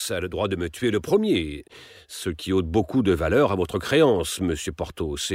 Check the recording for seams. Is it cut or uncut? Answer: uncut